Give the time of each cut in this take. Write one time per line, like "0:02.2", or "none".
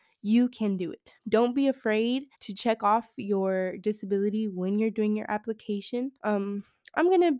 0:01.2
0:02.3
0:06.2